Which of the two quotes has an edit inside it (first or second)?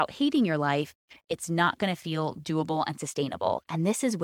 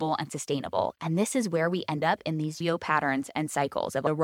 second